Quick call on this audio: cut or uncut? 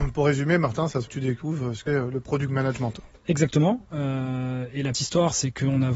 cut